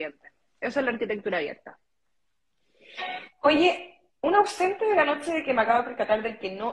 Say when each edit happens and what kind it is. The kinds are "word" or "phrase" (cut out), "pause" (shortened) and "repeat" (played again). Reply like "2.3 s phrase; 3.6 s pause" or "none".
3.3 s pause